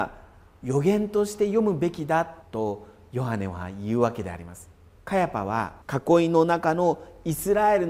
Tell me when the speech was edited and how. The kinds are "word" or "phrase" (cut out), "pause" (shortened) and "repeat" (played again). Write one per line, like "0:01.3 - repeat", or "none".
0:02.4 - pause
0:05.0 - pause
0:05.8 - pause